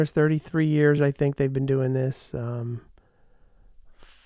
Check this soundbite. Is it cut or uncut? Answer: uncut